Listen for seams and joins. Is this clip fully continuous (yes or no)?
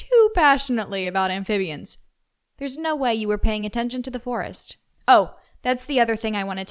yes